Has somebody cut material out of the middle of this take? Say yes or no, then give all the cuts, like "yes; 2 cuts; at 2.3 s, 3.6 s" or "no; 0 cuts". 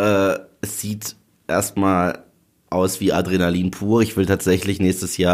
no; 0 cuts